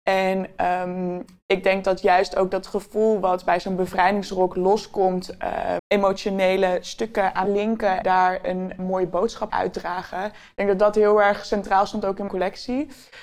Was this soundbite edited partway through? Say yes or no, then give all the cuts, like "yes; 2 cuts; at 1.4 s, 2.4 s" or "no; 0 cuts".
yes; 6 cuts; at 5.8 s, 7.5 s, 8.0 s, 8.8 s, 9.5 s, 12.3 s